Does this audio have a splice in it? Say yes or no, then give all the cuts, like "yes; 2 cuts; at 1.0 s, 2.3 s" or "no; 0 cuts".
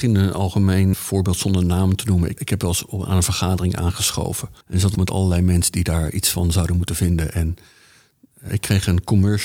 yes; 5 cuts; at 0.9 s, 2.4 s, 4.6 s, 4.9 s, 8.5 s